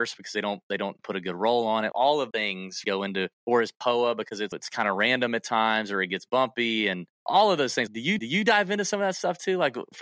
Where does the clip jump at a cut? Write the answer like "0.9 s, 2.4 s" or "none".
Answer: 1.0 s, 1.9 s, 2.3 s, 2.8 s, 3.3 s, 4.5 s, 7.1 s, 7.9 s, 8.2 s

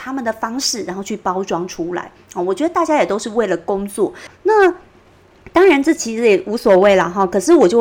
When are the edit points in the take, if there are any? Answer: 4.3 s

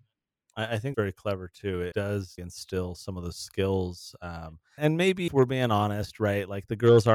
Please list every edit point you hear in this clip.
0.9 s, 1.9 s, 2.4 s, 4.8 s, 5.3 s

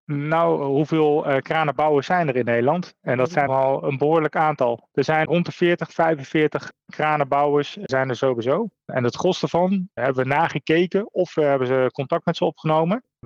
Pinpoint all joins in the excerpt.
3.5 s, 5.2 s

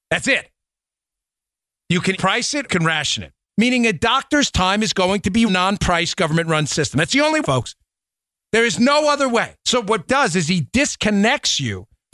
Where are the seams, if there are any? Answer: 2.1 s, 2.7 s, 3.4 s, 5.5 s, 7.4 s, 9.6 s, 10.1 s

